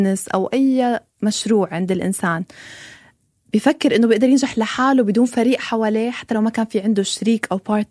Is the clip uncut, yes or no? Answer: yes